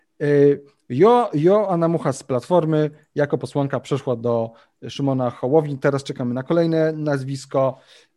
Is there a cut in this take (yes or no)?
no